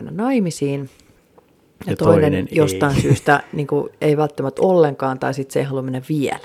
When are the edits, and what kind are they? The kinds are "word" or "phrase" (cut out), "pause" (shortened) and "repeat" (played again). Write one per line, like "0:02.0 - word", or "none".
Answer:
none